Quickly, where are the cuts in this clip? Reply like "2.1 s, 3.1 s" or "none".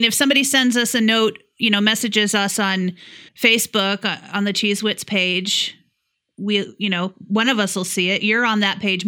3.3 s